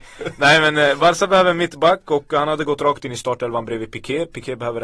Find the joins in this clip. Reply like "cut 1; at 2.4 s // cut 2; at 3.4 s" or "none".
none